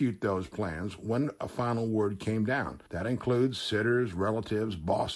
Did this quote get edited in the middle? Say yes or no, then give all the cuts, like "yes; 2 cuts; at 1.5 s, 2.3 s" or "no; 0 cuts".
yes; 1 cut; at 2.9 s